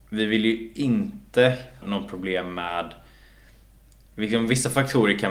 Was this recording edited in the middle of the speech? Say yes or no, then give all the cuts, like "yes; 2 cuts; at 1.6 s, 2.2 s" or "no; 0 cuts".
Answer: yes; 1 cut; at 1.8 s